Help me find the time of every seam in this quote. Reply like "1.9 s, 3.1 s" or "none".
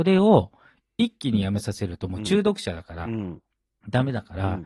none